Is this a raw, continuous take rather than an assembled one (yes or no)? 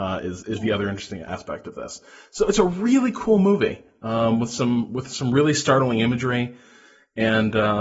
yes